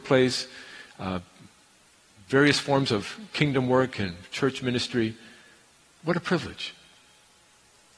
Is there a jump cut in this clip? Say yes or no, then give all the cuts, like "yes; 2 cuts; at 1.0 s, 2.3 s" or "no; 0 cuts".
no; 0 cuts